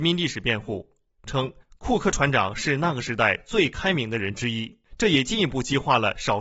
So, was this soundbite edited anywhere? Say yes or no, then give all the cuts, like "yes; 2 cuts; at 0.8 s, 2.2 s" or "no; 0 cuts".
yes; 2 cuts; at 1.6 s, 4.9 s